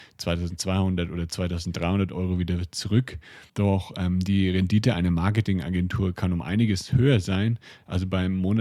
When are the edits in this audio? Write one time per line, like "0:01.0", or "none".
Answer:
0:03.5